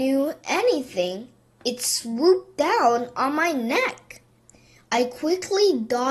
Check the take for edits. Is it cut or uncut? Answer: uncut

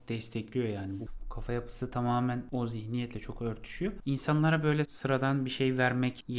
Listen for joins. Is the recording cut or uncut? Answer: cut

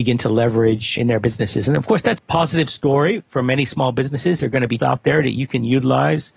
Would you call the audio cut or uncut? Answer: cut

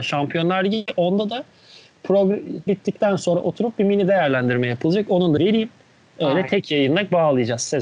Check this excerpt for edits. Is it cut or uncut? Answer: cut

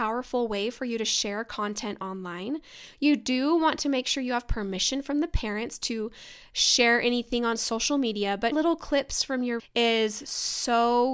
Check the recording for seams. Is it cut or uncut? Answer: cut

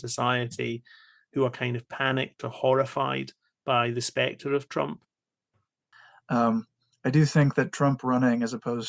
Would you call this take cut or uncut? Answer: uncut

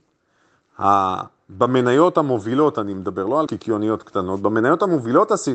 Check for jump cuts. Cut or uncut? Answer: cut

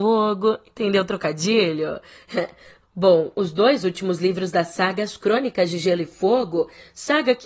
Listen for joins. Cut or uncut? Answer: uncut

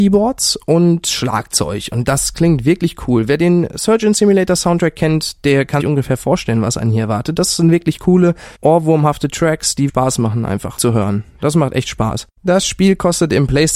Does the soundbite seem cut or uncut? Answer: cut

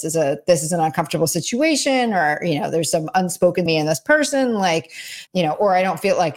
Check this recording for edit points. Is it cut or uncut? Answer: cut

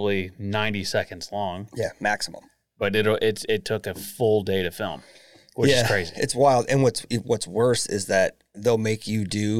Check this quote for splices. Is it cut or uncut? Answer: uncut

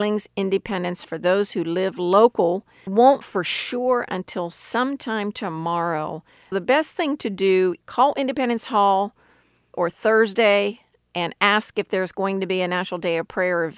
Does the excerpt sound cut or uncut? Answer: cut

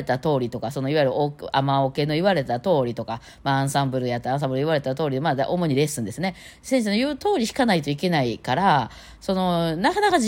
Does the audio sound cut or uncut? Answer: uncut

